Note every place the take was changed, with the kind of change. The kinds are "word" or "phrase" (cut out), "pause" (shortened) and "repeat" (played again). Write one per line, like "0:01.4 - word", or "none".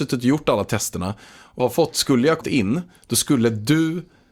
0:01.6 - word
0:02.4 - word